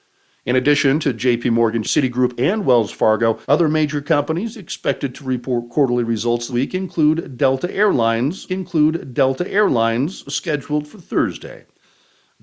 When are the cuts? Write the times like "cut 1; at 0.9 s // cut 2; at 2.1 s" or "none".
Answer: cut 1; at 1.8 s // cut 2; at 3.4 s // cut 3; at 6.5 s // cut 4; at 8.5 s